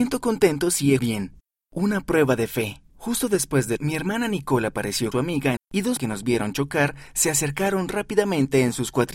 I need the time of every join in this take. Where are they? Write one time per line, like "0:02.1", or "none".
0:01.0
0:01.4
0:02.9
0:03.8
0:05.1
0:05.6
0:06.0